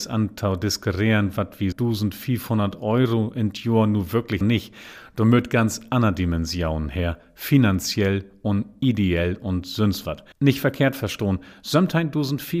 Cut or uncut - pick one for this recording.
cut